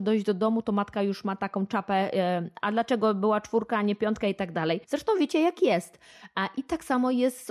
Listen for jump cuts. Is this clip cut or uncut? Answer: cut